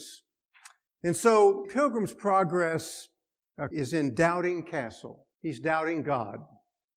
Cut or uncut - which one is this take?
cut